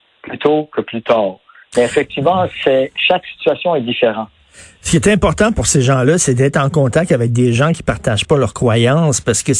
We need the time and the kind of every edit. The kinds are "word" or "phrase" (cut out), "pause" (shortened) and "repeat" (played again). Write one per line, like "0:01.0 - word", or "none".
none